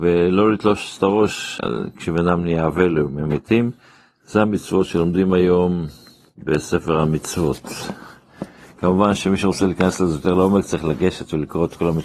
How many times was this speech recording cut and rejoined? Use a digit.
2